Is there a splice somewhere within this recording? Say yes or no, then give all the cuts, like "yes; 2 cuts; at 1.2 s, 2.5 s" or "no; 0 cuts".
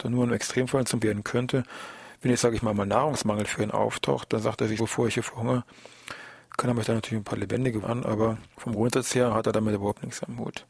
yes; 3 cuts; at 1.0 s, 4.8 s, 7.8 s